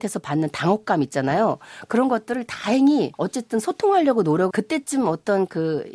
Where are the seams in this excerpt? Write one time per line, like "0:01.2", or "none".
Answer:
0:04.5